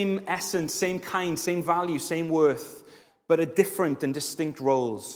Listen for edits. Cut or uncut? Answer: uncut